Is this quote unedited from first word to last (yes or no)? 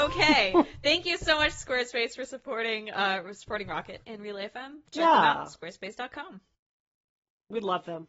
yes